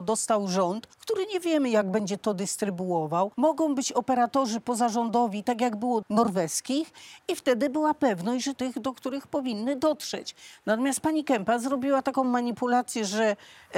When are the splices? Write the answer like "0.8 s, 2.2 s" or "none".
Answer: 0.9 s, 3.3 s, 6.0 s, 8.5 s